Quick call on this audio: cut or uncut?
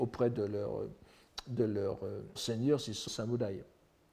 cut